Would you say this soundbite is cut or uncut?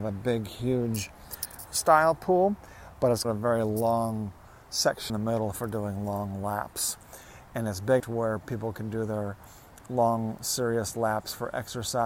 cut